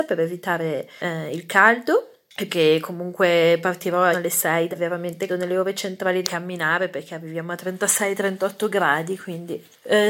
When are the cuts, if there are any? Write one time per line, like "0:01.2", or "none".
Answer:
0:02.5
0:04.1
0:04.7
0:05.3
0:06.2